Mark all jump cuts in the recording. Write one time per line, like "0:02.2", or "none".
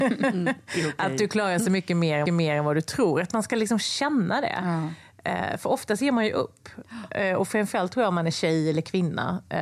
0:02.3